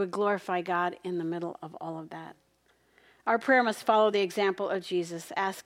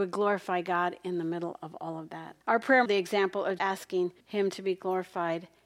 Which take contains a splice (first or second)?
second